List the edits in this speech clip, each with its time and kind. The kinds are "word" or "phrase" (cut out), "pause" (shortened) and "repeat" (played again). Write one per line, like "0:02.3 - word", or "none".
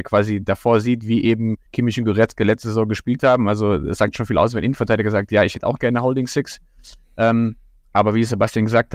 0:01.7 - pause

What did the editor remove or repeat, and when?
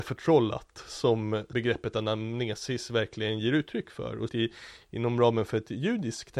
0:04.3 - word

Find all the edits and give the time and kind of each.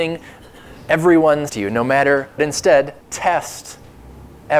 0:01.5 - word
0:02.4 - phrase
0:03.0 - pause

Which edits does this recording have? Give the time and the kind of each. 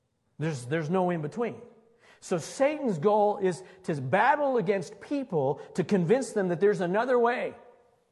none

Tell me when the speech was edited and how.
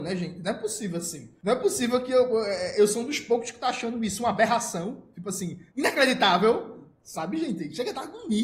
0:05.7 - pause

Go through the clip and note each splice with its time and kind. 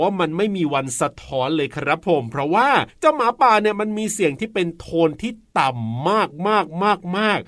0:02.9 - pause

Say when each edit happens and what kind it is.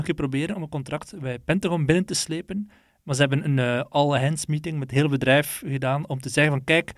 none

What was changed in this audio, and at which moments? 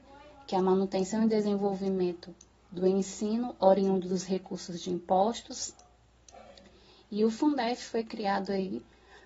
none

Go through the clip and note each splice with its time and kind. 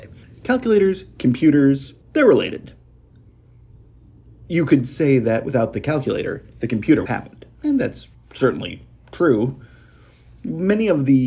0:02.0 - pause
0:07.1 - word
0:08.1 - pause

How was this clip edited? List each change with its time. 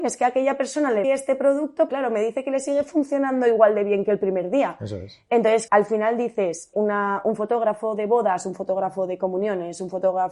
0:01.0 - word
0:01.9 - word
0:05.7 - word
0:06.7 - word

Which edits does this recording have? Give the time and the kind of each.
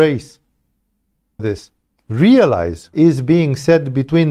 0:01.4 - word
0:02.9 - word

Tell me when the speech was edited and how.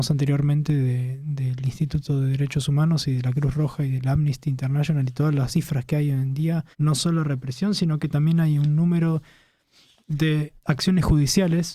0:06.7 - pause
0:10.6 - pause

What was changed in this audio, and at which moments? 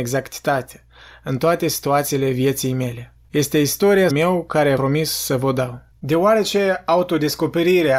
0:03.2 - pause
0:04.1 - word
0:04.8 - word
0:05.9 - pause

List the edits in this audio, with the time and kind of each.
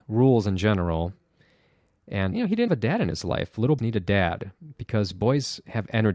0:02.3 - word
0:02.7 - word
0:03.8 - word

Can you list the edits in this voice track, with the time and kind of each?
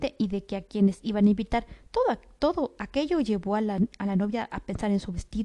none

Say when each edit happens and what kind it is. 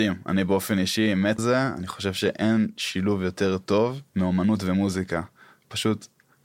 0:01.4 - word
0:04.1 - pause

